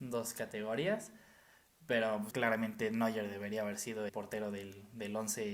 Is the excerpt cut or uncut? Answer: cut